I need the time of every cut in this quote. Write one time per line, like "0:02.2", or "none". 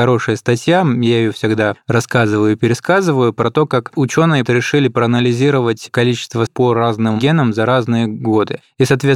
0:04.5
0:06.5